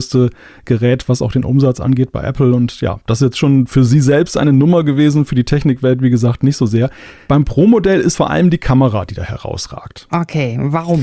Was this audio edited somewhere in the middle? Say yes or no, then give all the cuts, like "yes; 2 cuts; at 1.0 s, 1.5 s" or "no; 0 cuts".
yes; 1 cut; at 8.1 s